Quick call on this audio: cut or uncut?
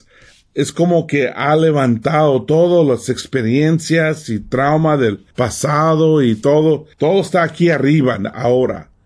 cut